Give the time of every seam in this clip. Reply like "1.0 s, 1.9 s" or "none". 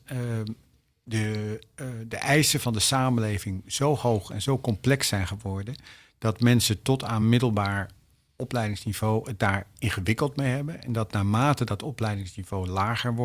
none